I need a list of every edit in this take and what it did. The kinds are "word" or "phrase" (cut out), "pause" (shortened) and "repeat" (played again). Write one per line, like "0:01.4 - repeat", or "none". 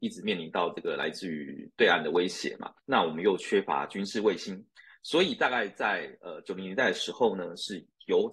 0:02.8 - pause